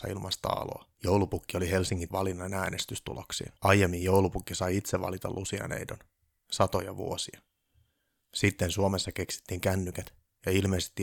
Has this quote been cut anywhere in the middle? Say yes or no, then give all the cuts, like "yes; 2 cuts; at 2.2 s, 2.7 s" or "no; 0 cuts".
yes; 3 cuts; at 0.9 s, 2.1 s, 3.6 s